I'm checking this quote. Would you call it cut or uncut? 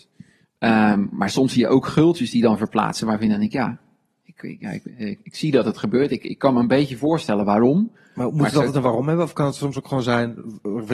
uncut